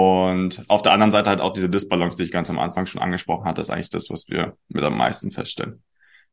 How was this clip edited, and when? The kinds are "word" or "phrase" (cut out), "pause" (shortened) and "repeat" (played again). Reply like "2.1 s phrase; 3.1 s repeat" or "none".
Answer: none